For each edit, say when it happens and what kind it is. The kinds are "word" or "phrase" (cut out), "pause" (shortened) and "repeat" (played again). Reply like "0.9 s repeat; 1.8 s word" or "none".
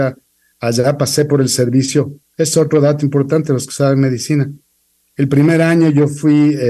none